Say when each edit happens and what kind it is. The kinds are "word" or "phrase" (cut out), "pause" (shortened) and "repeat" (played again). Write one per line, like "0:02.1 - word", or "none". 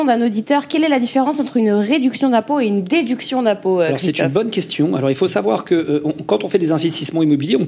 none